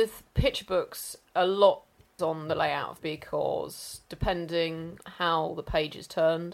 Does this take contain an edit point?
yes; 3 cuts; at 2.2 s, 3.0 s, 5.0 s

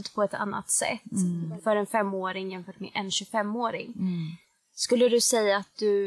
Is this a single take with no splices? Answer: yes; 0 cuts

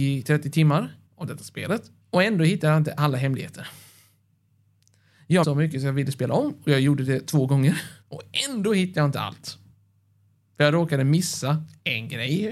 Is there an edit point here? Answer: yes; 4 cuts; at 1.1 s, 2.0 s, 5.4 s, 8.0 s

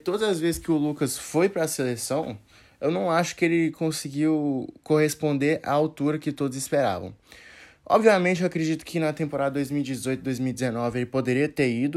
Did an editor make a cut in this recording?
no; 0 cuts

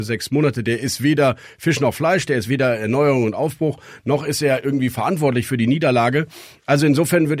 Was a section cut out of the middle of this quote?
no; 0 cuts

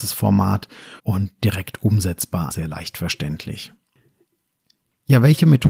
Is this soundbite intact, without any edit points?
no; 2 cuts; at 1.0 s, 2.5 s

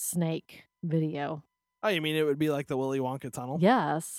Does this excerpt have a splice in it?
no; 0 cuts

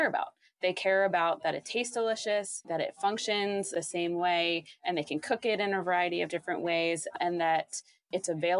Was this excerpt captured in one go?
yes; 0 cuts

